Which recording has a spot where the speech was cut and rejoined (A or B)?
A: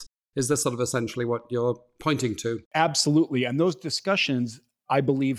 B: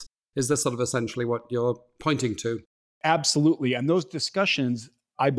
A